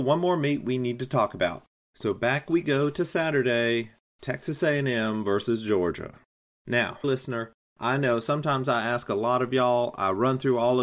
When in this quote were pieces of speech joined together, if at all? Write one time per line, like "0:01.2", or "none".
0:07.0